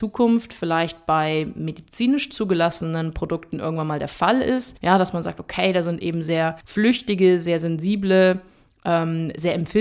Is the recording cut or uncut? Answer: uncut